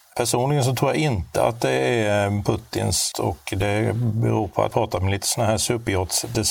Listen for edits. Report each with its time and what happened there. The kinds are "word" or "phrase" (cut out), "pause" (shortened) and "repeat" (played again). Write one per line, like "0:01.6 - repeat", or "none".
0:03.1 - word
0:04.7 - word